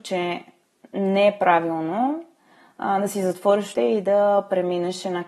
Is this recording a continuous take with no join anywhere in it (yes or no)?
no